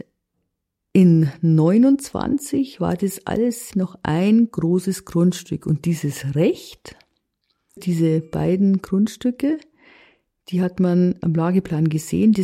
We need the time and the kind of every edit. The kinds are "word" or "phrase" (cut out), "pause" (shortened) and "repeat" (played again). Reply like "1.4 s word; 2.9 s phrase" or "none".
3.7 s word; 7.8 s word; 11.2 s word